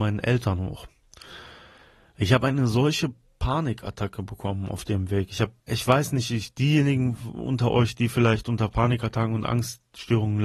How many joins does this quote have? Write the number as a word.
one